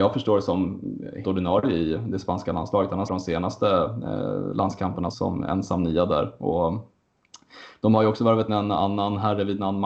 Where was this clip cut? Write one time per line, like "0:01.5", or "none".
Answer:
0:01.2
0:03.1
0:05.1
0:08.5

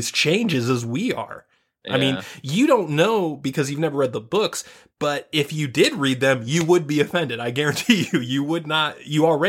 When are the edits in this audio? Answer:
none

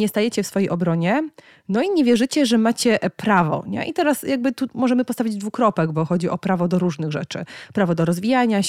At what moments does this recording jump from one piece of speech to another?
none

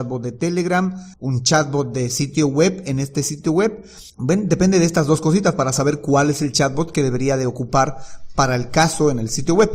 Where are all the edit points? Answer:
0:01.1
0:04.1

